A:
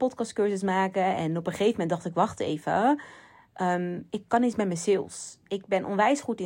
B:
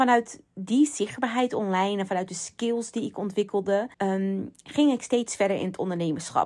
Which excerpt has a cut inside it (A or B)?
B